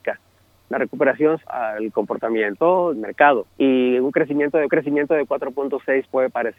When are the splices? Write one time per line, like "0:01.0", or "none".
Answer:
0:01.4
0:03.0
0:03.5
0:04.7